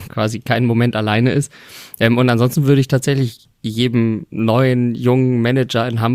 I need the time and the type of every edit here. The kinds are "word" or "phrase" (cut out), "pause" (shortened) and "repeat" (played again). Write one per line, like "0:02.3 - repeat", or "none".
0:03.5 - pause